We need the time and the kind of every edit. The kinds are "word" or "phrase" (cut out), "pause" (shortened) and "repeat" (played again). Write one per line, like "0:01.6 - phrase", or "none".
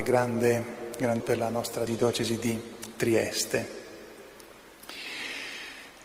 0:01.2 - word
0:01.9 - word

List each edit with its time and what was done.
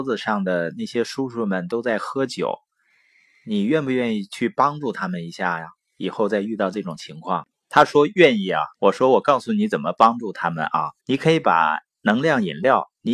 0:08.7 - pause
0:11.0 - pause

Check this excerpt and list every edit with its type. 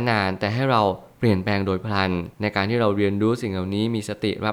0:02.3 - pause

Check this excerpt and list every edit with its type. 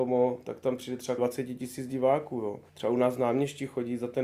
0:01.2 - word
0:02.7 - pause

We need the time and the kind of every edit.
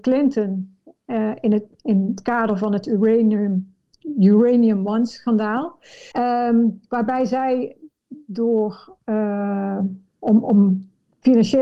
0:06.1 - pause

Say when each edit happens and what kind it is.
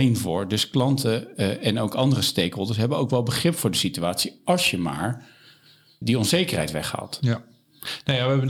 0:06.0 - word

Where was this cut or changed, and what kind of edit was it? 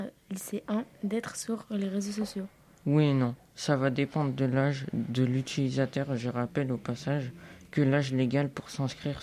none

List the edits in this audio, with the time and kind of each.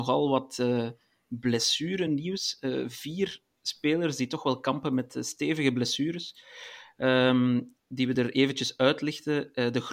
none

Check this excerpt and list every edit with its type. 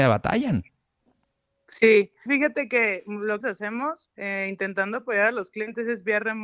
0:02.3 - phrase
0:03.4 - phrase

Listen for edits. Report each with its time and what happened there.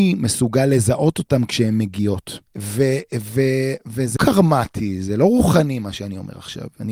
0:02.5 - pause
0:04.2 - word

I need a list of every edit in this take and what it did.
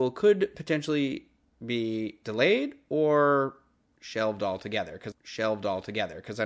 0:05.1 - repeat

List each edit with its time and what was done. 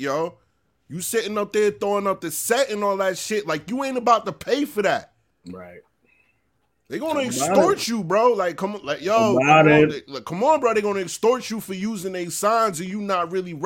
none

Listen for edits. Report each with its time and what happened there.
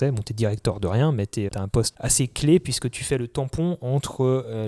0:01.5 - word
0:01.9 - word

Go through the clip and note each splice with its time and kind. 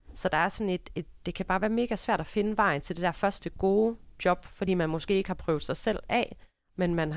none

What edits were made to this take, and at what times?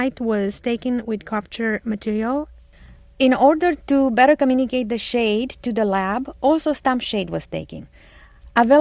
none

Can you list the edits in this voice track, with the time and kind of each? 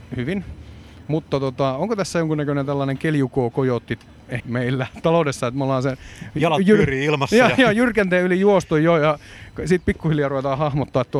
0:04.4 - word

